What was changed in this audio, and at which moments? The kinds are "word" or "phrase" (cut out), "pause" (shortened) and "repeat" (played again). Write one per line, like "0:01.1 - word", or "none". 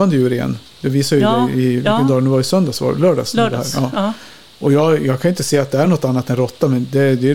none